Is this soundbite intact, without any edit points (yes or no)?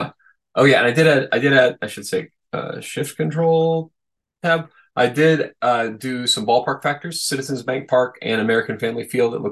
yes